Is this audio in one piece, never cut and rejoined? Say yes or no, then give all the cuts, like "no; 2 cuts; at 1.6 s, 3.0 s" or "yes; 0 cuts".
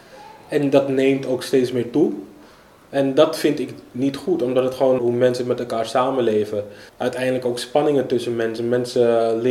no; 2 cuts; at 5.0 s, 6.9 s